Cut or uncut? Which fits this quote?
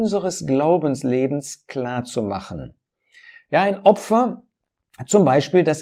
uncut